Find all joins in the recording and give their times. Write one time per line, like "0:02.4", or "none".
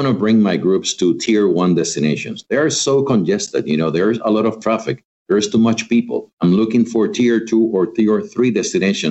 0:06.3